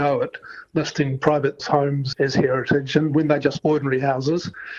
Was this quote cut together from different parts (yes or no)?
yes